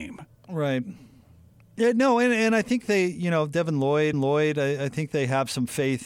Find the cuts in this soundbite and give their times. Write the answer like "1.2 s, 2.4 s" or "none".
1.5 s, 4.1 s